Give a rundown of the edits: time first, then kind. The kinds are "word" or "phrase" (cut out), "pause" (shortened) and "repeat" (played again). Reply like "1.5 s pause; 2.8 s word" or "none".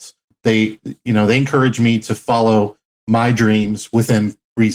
none